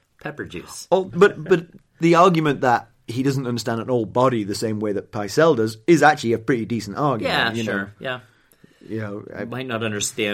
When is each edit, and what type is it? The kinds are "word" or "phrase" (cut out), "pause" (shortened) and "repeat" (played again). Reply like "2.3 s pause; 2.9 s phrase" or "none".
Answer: 1.1 s word